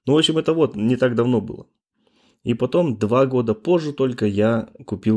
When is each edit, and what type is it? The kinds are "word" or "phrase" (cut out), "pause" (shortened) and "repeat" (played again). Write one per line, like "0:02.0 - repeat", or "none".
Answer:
none